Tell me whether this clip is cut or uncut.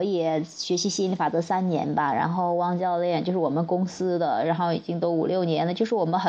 uncut